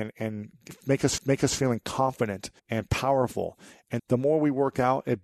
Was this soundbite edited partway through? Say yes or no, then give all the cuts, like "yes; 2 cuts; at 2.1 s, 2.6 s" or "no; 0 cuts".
yes; 3 cuts; at 1.2 s, 2.6 s, 4.0 s